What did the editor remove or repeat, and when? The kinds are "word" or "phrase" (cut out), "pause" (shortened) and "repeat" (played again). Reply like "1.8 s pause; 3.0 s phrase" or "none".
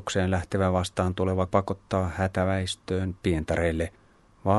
1.5 s word; 3.2 s word